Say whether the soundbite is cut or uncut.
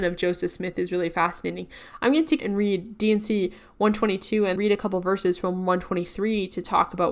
cut